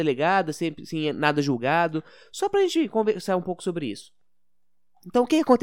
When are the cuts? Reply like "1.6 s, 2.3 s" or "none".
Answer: none

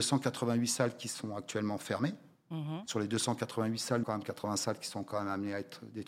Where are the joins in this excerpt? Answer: 4.0 s

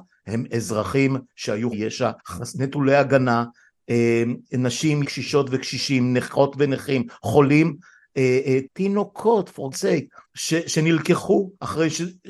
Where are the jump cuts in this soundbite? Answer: 1.7 s, 2.2 s, 5.0 s, 8.7 s, 9.7 s, 10.2 s

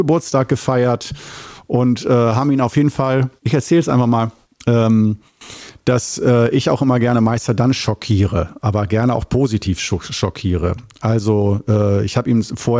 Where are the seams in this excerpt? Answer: 3.4 s, 4.4 s

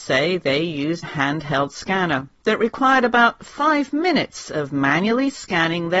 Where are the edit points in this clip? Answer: 1.0 s

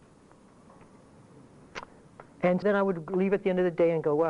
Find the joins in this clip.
2.6 s

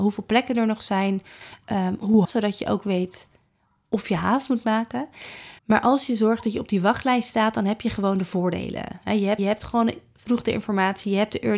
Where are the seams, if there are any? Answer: 2.2 s, 5.6 s, 9.4 s

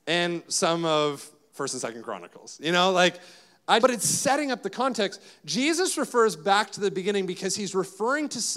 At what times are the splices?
3.8 s

